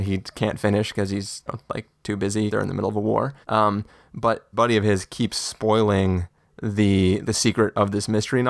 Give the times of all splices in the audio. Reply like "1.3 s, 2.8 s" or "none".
1.5 s, 2.5 s, 3.4 s, 4.5 s, 7.2 s